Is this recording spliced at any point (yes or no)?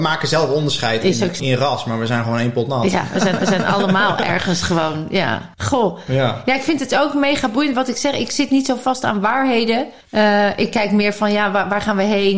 yes